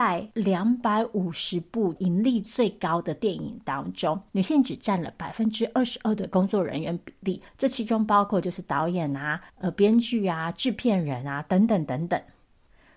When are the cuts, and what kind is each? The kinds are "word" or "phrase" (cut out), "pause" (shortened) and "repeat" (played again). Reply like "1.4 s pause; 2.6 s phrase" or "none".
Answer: 4.3 s pause; 7.5 s pause; 9.5 s pause